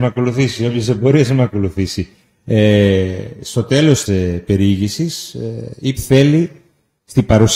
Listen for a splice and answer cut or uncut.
cut